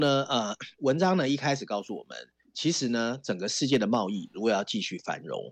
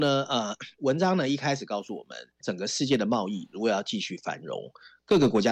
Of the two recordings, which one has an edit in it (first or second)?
second